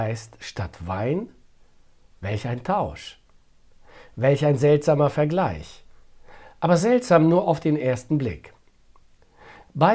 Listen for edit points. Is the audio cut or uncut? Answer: uncut